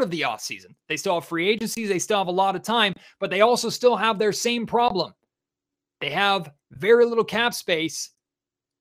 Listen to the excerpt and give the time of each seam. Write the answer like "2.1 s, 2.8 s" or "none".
none